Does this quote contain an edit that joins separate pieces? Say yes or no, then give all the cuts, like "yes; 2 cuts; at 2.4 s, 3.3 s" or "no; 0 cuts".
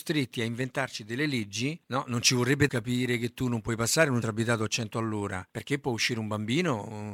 yes; 4 cuts; at 1.8 s, 2.7 s, 4.2 s, 5.5 s